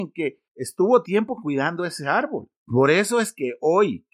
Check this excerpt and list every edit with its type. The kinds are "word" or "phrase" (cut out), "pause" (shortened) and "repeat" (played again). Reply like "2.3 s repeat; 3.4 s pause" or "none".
1.0 s phrase